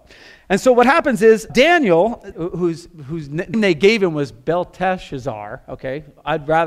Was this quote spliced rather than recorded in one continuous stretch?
yes; 3 cuts; at 1.5 s, 2.3 s, 3.5 s

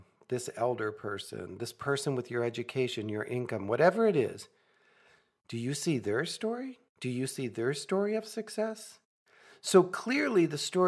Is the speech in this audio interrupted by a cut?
no; 0 cuts

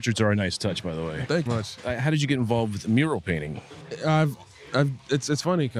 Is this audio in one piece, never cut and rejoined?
no; 1 cut; at 1.5 s

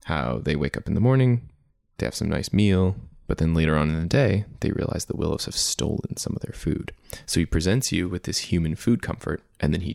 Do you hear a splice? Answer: no; 0 cuts

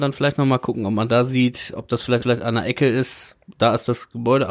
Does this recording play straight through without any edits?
no; 2 cuts; at 1.7 s, 2.2 s

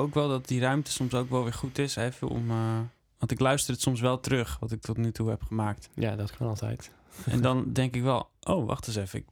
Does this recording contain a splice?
no; 0 cuts

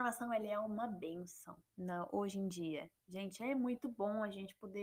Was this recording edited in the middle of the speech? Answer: no; 0 cuts

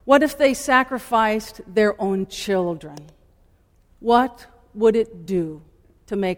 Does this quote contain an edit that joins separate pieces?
no; 0 cuts

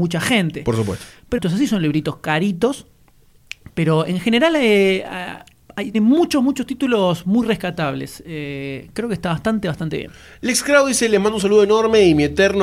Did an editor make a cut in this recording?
yes; 2 cuts; at 1.4 s, 5.9 s

